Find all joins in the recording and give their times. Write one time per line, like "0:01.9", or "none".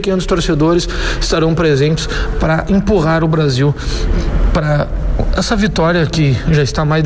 none